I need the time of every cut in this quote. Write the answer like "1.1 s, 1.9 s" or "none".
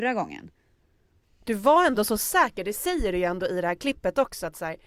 none